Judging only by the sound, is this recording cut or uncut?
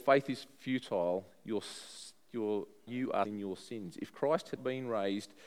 cut